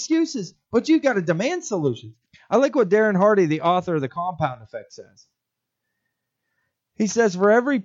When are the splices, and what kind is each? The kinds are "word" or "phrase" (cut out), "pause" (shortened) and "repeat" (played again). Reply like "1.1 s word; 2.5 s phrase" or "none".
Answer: none